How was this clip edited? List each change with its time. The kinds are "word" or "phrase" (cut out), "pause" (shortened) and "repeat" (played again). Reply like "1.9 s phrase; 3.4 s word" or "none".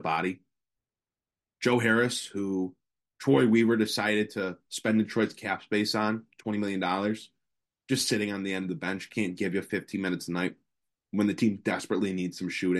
none